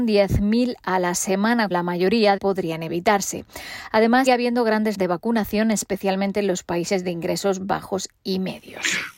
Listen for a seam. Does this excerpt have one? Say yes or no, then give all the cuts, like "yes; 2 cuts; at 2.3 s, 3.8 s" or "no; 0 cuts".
yes; 4 cuts; at 1.7 s, 2.4 s, 4.3 s, 4.9 s